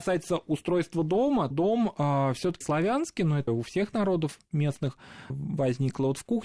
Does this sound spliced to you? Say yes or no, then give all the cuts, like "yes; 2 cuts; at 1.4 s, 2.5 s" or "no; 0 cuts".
yes; 4 cuts; at 1.5 s, 2.6 s, 3.5 s, 5.3 s